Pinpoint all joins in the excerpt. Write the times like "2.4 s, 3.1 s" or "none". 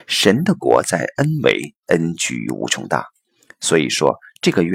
none